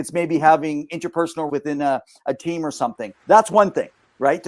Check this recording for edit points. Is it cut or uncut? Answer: cut